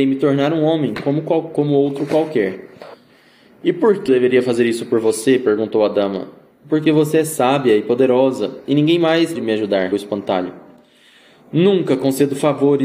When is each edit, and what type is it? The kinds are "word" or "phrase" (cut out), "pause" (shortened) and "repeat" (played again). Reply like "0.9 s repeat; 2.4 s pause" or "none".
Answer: 4.1 s word; 9.3 s word; 9.9 s word